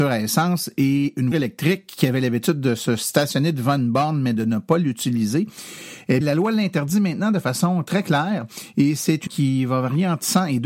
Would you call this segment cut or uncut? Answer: cut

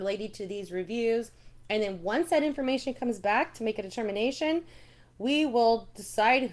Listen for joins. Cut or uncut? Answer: uncut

